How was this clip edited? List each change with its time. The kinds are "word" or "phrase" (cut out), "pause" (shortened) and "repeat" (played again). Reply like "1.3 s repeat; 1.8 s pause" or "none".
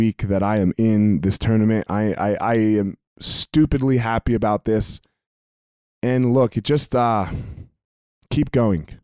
none

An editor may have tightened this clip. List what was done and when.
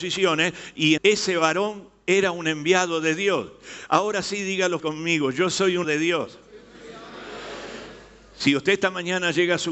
1.0 s word; 4.8 s word; 5.8 s word

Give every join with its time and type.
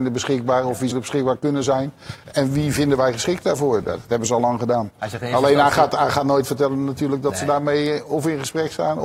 0.9 s word

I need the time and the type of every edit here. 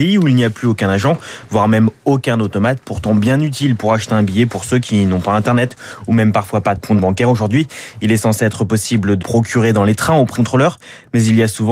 6.8 s phrase; 9.2 s phrase; 10.4 s word

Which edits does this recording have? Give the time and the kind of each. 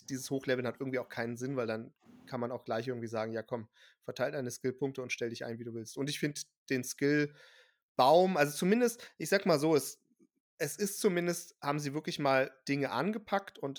none

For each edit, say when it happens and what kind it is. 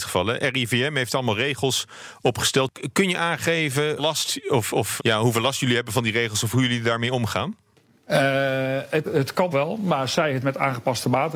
4.0 s word; 5.0 s word; 9.0 s word; 9.5 s word

